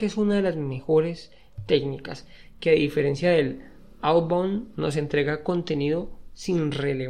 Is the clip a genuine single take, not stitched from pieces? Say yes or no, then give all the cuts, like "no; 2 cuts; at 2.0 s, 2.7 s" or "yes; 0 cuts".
no; 1 cut; at 4.7 s